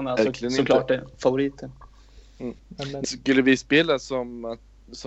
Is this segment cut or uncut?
cut